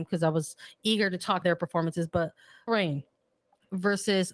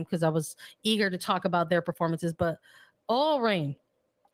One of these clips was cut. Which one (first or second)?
first